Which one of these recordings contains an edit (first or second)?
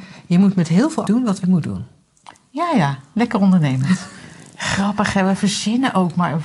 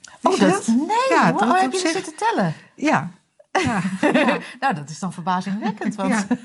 first